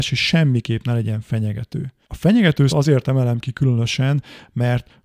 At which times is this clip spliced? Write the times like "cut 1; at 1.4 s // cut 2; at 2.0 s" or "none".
cut 1; at 2.0 s // cut 2; at 2.7 s